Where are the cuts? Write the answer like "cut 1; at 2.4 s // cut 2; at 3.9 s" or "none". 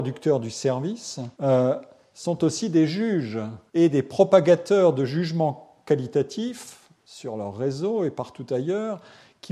cut 1; at 1.3 s // cut 2; at 3.7 s